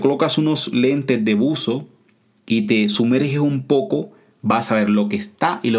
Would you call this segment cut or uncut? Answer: uncut